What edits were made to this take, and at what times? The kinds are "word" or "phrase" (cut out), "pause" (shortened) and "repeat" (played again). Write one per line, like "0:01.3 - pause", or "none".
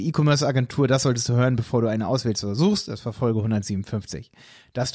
none